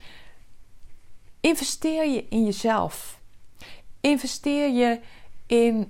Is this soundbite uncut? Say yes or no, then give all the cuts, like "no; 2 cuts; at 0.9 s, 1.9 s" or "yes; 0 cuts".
yes; 0 cuts